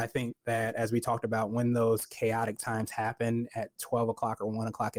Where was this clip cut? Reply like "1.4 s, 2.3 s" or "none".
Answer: none

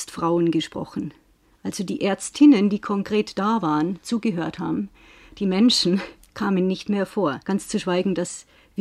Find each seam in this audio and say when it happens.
7.4 s

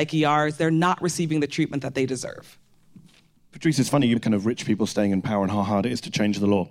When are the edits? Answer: 4.2 s

